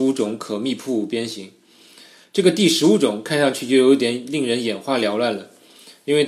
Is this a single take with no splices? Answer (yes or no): yes